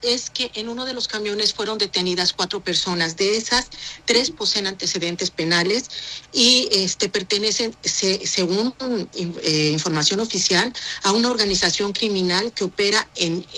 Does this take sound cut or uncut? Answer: uncut